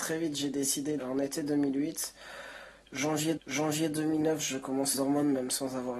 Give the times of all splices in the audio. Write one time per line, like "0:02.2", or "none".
0:01.0
0:03.4
0:04.9